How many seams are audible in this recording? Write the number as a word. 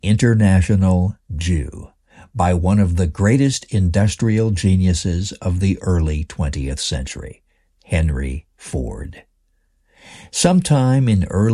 zero